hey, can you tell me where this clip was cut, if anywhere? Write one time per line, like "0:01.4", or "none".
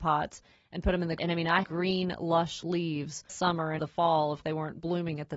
0:01.2
0:01.6
0:03.3
0:03.8
0:04.4

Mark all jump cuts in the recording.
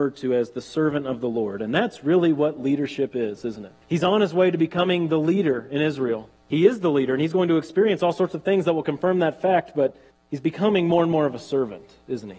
0:03.8
0:06.4
0:10.1

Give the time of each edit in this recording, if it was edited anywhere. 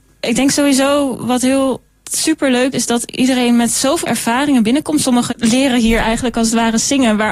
0:02.0
0:02.7
0:04.0
0:05.3

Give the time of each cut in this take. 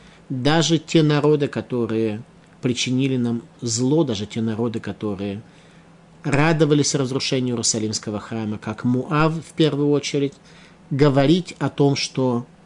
none

